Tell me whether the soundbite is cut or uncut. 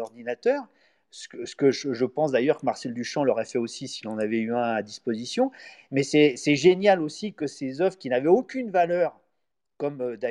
uncut